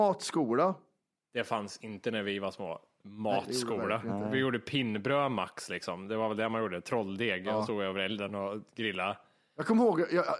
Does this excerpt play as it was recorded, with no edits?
yes; 0 cuts

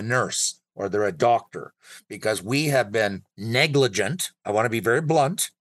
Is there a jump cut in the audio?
yes; 1 cut; at 3.3 s

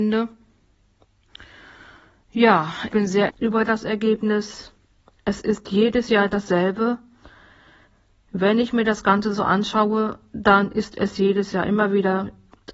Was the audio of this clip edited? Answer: yes; 2 cuts; at 2.9 s, 3.3 s

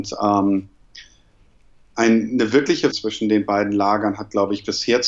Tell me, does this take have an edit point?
yes; 1 cut; at 2.9 s

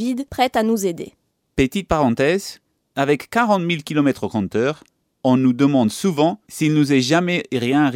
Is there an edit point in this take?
no; 0 cuts

